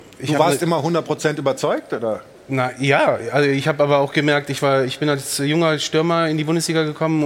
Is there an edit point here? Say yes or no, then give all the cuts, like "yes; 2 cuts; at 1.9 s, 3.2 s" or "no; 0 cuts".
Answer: no; 0 cuts